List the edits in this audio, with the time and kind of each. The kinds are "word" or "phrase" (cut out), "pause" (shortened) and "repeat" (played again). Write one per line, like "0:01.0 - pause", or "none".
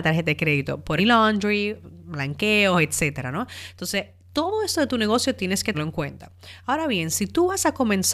0:01.0 - phrase
0:05.7 - word

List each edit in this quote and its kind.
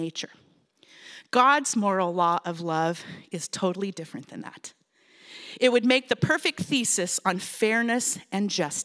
none

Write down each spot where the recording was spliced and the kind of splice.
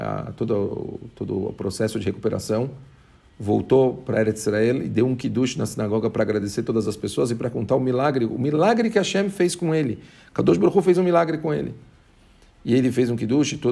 none

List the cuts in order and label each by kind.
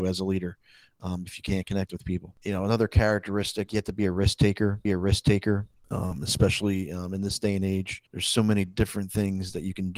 0:03.7 - phrase
0:04.8 - repeat
0:08.1 - pause

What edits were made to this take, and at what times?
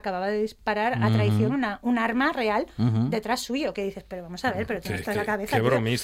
0:05.1 - word

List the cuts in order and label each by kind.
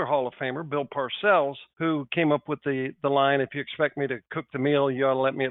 0:01.7 - pause

